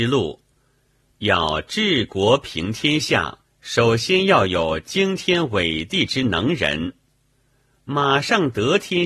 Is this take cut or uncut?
cut